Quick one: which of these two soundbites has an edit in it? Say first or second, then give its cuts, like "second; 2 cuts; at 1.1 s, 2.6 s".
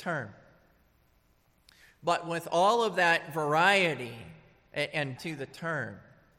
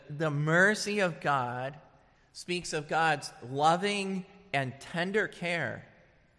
first; 1 cut; at 5.2 s